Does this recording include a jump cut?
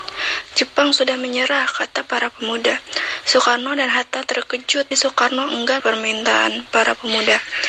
yes; 2 cuts; at 4.9 s, 5.8 s

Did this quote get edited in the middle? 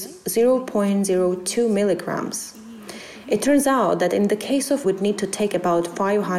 yes; 1 cut; at 4.8 s

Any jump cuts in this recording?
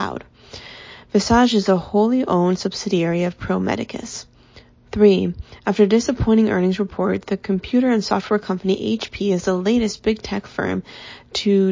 no; 0 cuts

